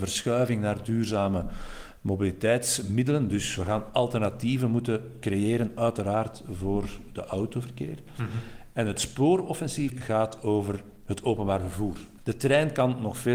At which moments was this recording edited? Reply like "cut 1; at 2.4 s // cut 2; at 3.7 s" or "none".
cut 1; at 9.9 s